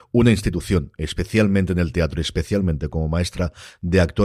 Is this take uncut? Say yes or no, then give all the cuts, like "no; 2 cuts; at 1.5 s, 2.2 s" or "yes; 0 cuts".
yes; 0 cuts